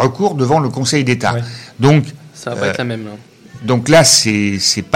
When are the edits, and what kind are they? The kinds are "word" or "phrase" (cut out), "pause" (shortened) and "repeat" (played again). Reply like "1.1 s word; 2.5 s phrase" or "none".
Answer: none